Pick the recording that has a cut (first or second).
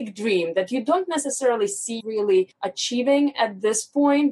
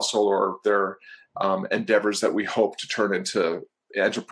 first